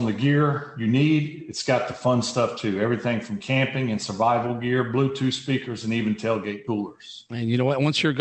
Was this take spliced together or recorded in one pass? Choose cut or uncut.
uncut